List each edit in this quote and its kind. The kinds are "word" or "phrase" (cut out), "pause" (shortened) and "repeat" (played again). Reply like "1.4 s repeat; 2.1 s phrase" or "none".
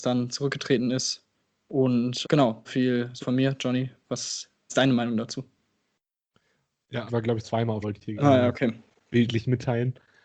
2.2 s word; 2.6 s word; 3.2 s word; 4.7 s word; 7.1 s word; 7.4 s word; 7.8 s word; 8.2 s word